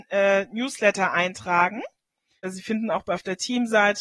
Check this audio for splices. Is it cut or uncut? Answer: uncut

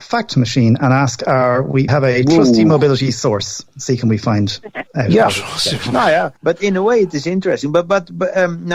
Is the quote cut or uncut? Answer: cut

